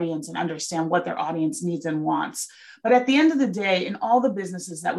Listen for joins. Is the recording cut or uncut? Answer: uncut